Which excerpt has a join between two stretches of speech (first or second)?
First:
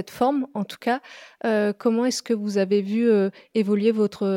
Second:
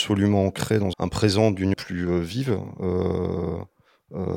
second